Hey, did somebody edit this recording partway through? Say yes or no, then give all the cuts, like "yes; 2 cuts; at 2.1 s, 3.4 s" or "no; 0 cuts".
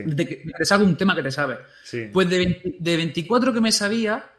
no; 0 cuts